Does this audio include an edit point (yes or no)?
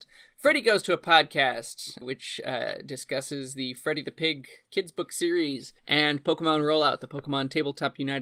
yes